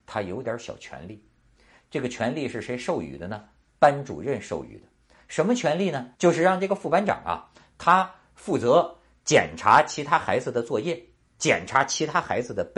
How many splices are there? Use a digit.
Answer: 1